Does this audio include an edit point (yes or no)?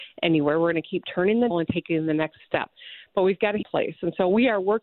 yes